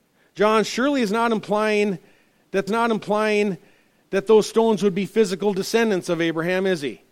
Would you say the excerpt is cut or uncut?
cut